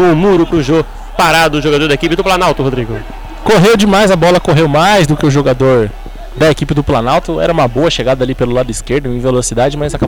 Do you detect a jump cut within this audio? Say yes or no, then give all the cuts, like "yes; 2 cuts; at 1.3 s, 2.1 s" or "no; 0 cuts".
no; 0 cuts